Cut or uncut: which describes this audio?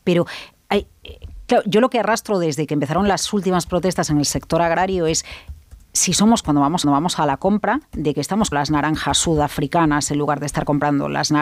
cut